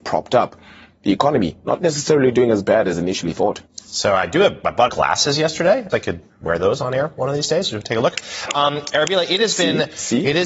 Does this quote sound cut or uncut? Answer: cut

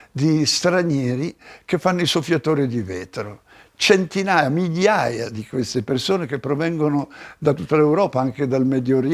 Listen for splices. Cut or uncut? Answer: uncut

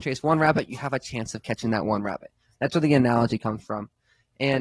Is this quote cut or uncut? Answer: uncut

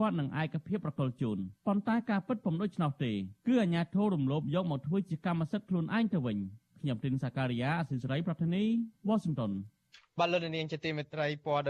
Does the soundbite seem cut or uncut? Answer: cut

